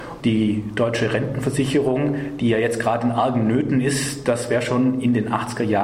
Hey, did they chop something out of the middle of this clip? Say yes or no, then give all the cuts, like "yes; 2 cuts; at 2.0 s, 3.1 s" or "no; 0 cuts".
no; 0 cuts